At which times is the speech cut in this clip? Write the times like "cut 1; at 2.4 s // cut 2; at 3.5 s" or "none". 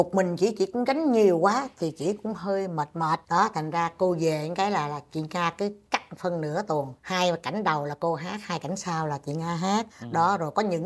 cut 1; at 3.2 s // cut 2; at 7.0 s // cut 3; at 9.9 s

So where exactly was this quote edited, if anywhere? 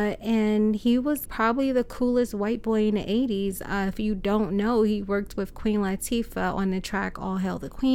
cut 1; at 1.2 s

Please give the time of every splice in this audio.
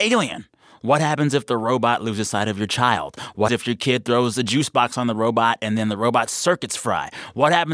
cut 1; at 3.5 s

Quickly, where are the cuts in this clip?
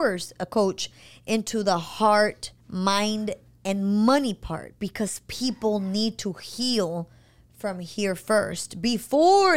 cut 1; at 2.6 s

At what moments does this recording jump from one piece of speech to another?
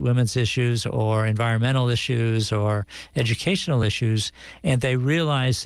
none

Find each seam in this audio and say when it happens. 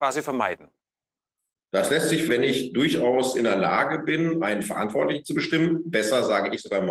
cut 1; at 2.3 s

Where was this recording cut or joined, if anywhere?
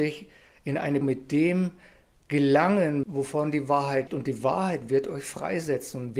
cut 1; at 1.0 s // cut 2; at 3.0 s // cut 3; at 4.1 s

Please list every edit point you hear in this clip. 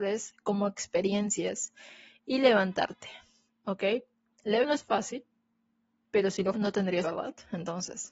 cut 1; at 4.6 s // cut 2; at 6.5 s // cut 3; at 7.0 s

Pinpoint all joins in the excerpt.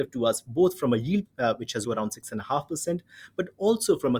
cut 1; at 1.2 s // cut 2; at 1.8 s

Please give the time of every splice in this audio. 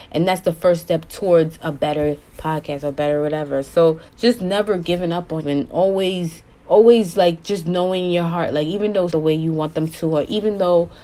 cut 1; at 4.1 s // cut 2; at 5.4 s // cut 3; at 6.5 s // cut 4; at 9.1 s

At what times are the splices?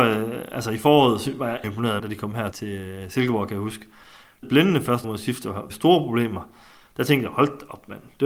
cut 1; at 1.6 s // cut 2; at 2.0 s // cut 3; at 2.5 s // cut 4; at 4.4 s // cut 5; at 5.0 s // cut 6; at 5.7 s

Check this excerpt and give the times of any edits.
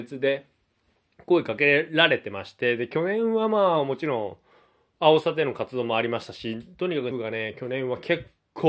cut 1; at 7.1 s

